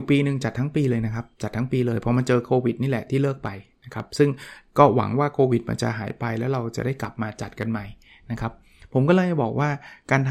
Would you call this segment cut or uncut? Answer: uncut